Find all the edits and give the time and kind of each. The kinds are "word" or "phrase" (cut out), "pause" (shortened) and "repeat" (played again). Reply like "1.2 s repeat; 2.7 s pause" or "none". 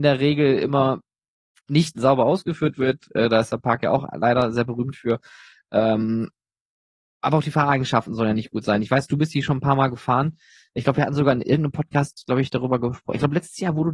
1.3 s pause